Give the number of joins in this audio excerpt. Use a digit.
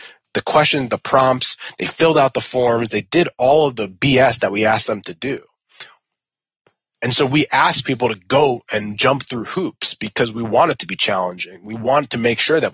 0